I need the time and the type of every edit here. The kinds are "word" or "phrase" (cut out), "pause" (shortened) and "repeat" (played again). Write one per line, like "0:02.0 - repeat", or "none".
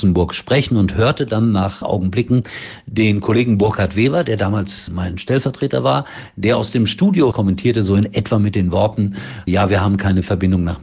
0:01.8 - phrase
0:04.9 - word
0:07.3 - word
0:09.5 - word